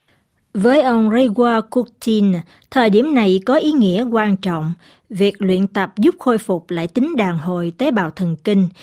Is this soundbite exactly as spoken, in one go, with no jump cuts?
yes; 0 cuts

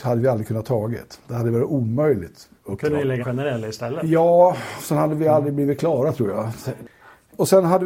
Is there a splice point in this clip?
yes; 2 cuts; at 2.5 s, 3.2 s

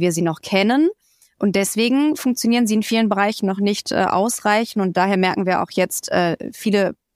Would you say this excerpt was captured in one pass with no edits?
yes; 0 cuts

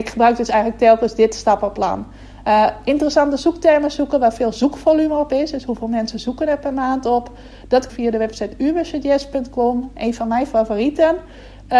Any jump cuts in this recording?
yes; 1 cut; at 7.9 s

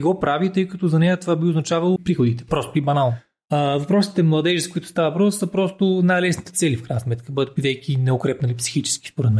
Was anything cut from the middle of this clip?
yes; 1 cut; at 2.0 s

